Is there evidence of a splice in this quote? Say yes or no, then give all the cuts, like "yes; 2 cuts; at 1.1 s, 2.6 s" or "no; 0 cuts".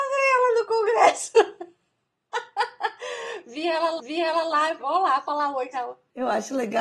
yes; 3 cuts; at 4.0 s, 4.8 s, 5.7 s